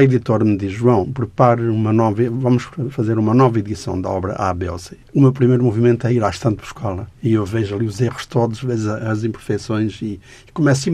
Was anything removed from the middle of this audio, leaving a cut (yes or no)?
yes